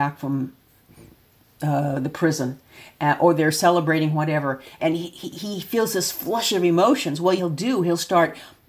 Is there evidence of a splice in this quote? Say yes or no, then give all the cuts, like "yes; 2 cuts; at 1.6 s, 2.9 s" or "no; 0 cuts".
yes; 2 cuts; at 4.8 s, 7.4 s